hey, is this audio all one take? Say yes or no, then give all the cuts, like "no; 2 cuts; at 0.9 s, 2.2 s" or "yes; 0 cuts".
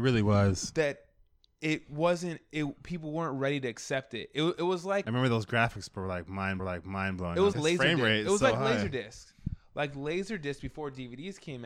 no; 3 cuts; at 5.0 s, 6.6 s, 7.5 s